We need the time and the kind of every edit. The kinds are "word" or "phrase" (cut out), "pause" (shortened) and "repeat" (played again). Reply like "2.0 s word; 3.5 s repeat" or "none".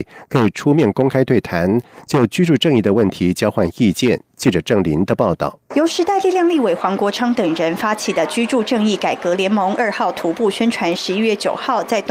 5.7 s pause